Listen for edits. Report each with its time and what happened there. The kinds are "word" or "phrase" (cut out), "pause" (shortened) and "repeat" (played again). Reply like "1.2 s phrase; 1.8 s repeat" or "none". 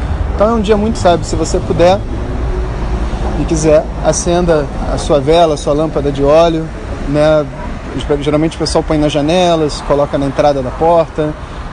0.9 s word